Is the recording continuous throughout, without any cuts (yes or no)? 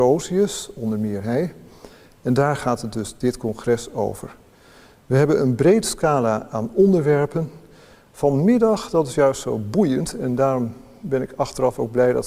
yes